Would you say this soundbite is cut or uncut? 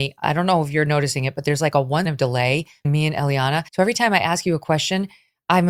cut